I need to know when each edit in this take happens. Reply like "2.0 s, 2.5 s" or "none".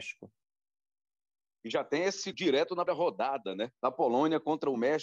2.3 s, 2.9 s, 3.8 s